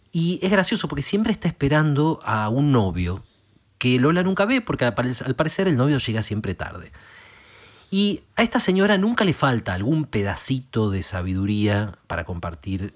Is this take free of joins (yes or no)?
yes